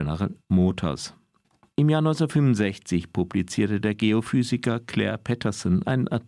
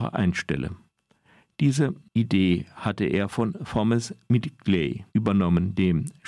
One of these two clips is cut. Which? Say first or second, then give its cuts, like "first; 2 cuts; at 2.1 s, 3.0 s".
second; 1 cut; at 5.1 s